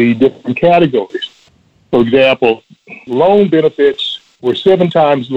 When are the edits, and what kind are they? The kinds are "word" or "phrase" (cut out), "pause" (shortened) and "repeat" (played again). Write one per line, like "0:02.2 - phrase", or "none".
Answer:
none